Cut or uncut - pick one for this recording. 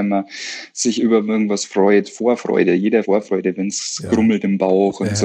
cut